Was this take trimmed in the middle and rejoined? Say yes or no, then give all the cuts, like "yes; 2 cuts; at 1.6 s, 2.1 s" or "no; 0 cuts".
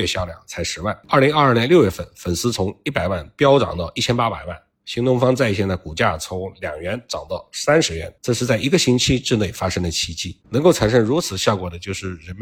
yes; 3 cuts; at 1.0 s, 8.2 s, 10.4 s